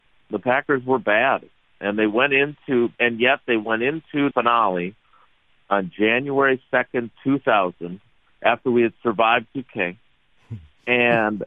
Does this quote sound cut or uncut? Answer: cut